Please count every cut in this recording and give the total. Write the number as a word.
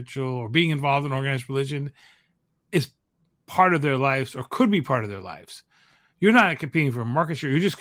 zero